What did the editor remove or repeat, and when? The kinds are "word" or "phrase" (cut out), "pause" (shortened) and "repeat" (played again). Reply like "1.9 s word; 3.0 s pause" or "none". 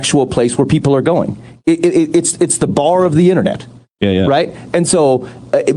none